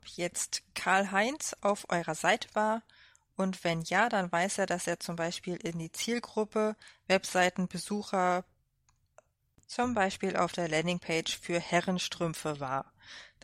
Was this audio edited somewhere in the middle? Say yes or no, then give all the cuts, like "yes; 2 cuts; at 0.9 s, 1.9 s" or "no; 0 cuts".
no; 0 cuts